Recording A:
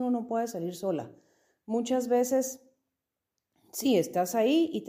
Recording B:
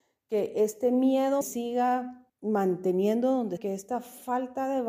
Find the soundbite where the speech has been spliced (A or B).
B